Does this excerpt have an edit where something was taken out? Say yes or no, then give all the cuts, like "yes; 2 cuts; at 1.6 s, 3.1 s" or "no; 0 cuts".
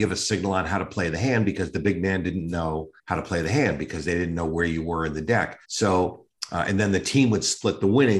yes; 2 cuts; at 3.0 s, 5.6 s